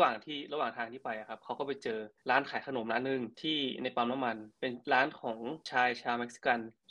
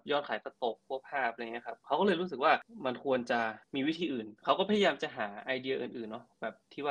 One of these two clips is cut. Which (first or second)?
first